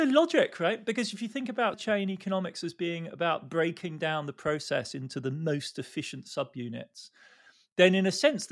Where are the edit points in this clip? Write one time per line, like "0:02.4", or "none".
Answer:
0:01.7